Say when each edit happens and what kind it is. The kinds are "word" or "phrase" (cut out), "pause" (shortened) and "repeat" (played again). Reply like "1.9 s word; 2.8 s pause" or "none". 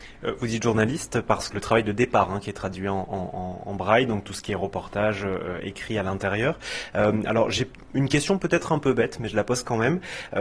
1.5 s phrase